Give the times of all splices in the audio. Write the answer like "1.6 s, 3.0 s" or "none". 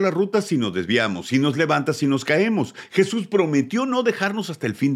none

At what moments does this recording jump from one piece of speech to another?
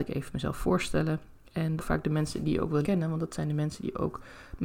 1.8 s, 2.8 s

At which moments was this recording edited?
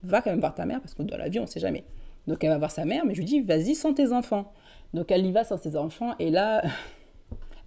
none

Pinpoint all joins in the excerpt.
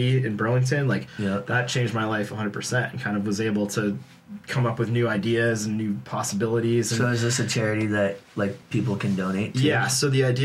8.6 s

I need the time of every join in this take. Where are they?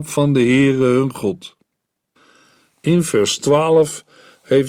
none

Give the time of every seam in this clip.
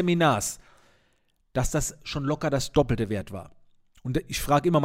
none

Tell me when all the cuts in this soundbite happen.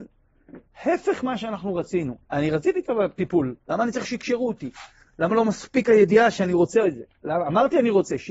2.2 s, 3.6 s

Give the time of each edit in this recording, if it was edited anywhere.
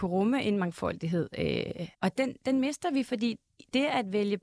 1.9 s

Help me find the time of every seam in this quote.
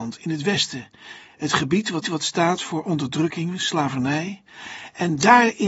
2.0 s

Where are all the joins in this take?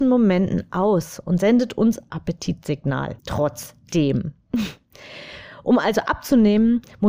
2.1 s, 3.2 s

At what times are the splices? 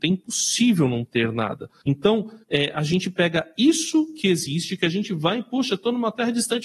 2.4 s

